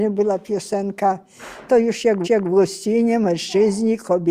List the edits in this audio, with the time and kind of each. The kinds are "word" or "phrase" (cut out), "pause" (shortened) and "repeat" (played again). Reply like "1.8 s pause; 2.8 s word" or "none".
2.2 s repeat